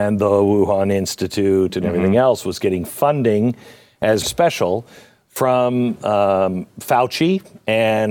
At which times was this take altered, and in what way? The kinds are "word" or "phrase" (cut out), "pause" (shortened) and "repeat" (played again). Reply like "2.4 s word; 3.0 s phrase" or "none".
4.2 s phrase